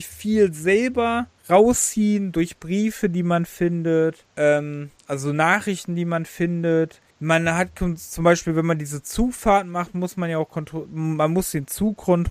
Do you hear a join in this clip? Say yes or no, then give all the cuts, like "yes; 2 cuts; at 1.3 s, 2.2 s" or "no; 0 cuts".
yes; 3 cuts; at 1.4 s, 4.3 s, 7.1 s